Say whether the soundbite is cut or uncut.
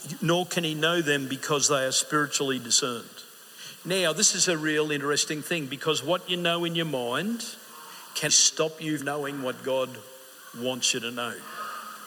cut